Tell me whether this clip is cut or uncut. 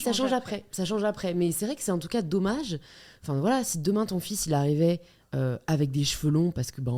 uncut